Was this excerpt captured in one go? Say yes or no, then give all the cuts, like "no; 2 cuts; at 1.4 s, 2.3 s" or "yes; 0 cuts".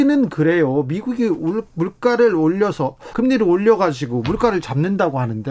no; 1 cut; at 3.1 s